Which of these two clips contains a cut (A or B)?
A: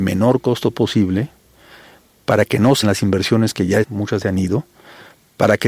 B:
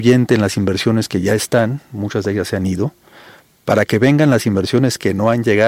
A